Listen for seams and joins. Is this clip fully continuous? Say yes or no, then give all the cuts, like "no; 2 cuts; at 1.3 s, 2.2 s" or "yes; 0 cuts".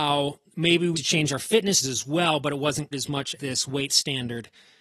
no; 5 cuts; at 0.9 s, 1.8 s, 2.9 s, 3.4 s, 3.9 s